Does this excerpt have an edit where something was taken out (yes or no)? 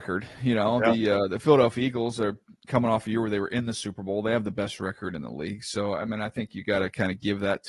no